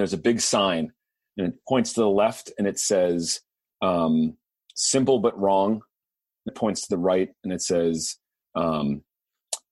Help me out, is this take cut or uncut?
cut